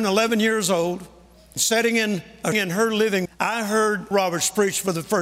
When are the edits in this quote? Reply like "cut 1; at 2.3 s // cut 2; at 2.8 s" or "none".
cut 1; at 1.6 s // cut 2; at 2.5 s // cut 3; at 3.3 s // cut 4; at 4.1 s